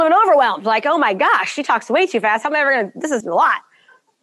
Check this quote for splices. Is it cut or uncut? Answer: cut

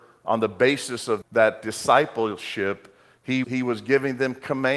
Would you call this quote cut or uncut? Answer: cut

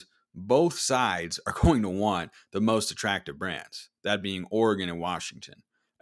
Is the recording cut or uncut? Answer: uncut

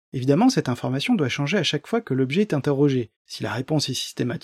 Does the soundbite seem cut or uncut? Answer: cut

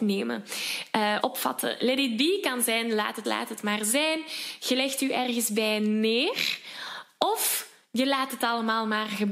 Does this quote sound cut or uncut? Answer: cut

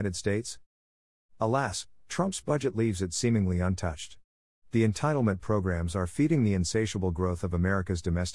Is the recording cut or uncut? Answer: uncut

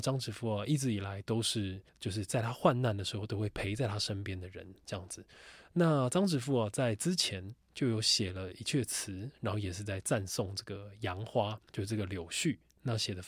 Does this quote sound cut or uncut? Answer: cut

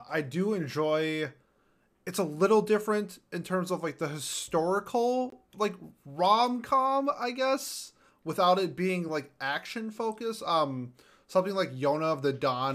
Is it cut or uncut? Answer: uncut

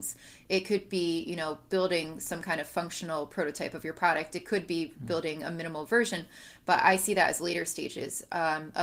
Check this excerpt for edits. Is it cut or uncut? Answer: uncut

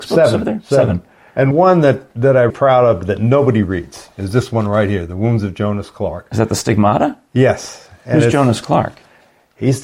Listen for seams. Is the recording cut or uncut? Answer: cut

